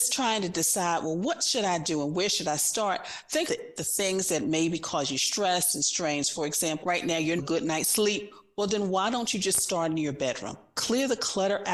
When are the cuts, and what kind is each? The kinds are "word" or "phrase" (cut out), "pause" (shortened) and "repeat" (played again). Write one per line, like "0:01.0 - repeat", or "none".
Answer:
0:03.5 - phrase
0:06.8 - word
0:07.4 - phrase